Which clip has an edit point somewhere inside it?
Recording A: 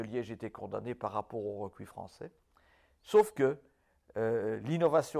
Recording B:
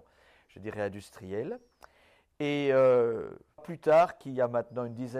B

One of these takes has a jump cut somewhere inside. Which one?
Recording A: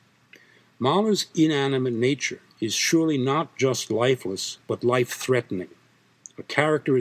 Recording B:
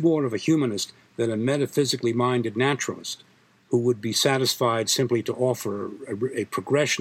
A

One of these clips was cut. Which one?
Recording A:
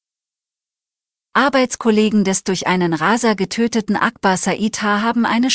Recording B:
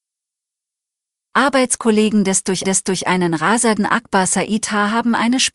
B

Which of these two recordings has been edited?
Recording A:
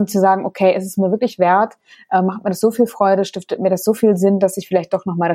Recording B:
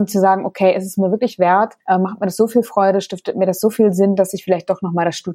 B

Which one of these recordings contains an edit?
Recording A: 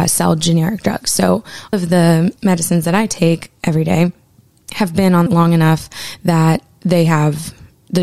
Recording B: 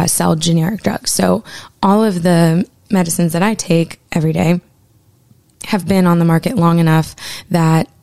A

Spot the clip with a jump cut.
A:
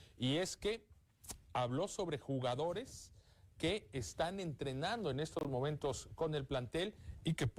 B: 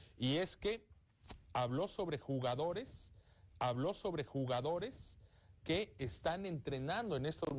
B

